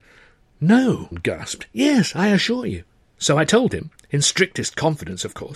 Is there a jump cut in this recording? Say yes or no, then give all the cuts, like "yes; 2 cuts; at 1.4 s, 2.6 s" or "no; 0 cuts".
yes; 1 cut; at 1.1 s